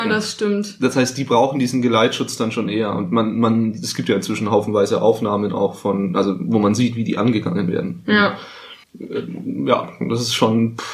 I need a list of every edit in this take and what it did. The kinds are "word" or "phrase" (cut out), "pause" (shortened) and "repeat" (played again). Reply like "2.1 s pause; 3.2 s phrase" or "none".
8.8 s pause